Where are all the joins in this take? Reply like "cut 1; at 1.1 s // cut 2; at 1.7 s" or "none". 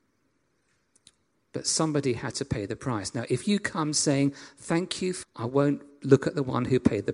cut 1; at 5.2 s